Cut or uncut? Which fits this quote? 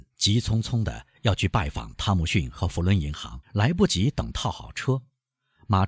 cut